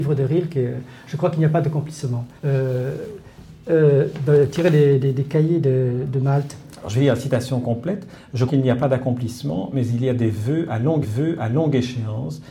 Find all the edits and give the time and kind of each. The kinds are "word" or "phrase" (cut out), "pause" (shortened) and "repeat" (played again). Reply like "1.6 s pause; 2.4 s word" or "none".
2.4 s pause; 8.5 s word; 11.0 s repeat